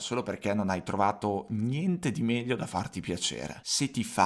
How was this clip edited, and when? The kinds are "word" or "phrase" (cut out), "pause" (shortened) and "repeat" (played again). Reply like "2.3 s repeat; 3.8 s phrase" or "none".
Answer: none